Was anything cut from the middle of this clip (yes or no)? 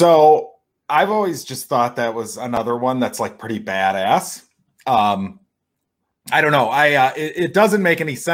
no